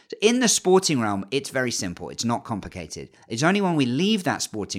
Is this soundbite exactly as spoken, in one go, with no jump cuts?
yes; 0 cuts

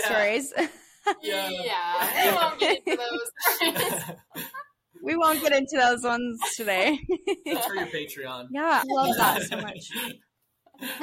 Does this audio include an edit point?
yes; 1 cut; at 8.8 s

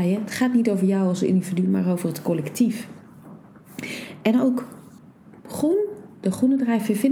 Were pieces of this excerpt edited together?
yes; 1 cut; at 5.0 s

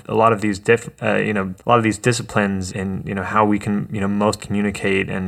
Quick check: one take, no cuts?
no; 3 cuts; at 1.6 s, 2.7 s, 4.4 s

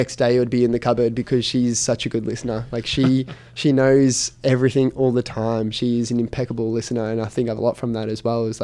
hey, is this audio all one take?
no; 1 cut; at 7.6 s

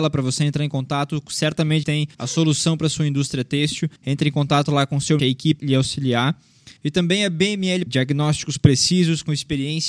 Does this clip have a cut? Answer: yes; 7 cuts; at 1.8 s, 2.1 s, 4.0 s, 5.2 s, 5.6 s, 6.8 s, 7.9 s

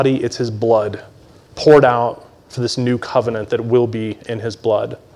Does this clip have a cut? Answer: no; 0 cuts

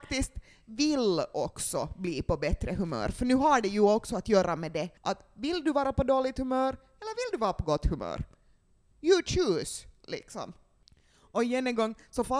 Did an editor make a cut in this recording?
yes; 1 cut; at 5.0 s

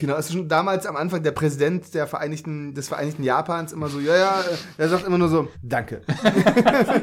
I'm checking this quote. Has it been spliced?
yes; 1 cut; at 5.5 s

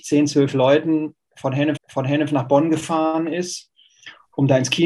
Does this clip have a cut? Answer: yes; 1 cut; at 1.8 s

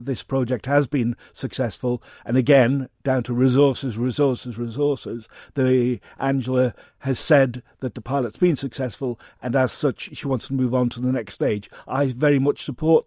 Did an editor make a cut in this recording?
no; 0 cuts

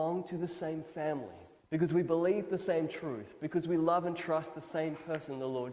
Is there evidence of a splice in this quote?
yes; 1 cut; at 1.6 s

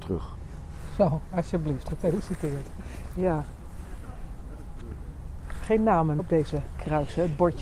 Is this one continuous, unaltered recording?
no; 2 cuts; at 5.6 s, 6.2 s

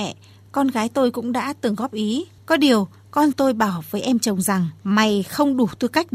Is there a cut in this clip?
yes; 3 cuts; at 2.4 s, 3.3 s, 4.8 s

